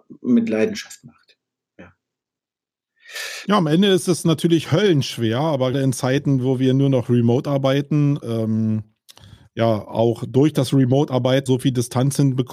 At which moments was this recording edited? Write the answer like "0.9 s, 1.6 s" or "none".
5.7 s, 8.2 s, 11.5 s